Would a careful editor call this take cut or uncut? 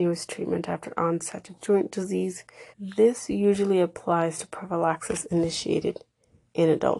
cut